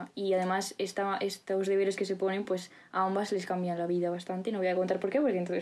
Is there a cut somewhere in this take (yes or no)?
no